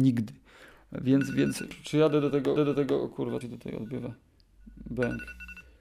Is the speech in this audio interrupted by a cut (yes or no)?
yes